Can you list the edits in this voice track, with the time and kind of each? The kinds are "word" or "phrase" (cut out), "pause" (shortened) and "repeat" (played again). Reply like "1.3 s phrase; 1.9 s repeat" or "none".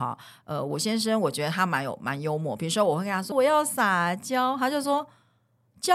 3.3 s word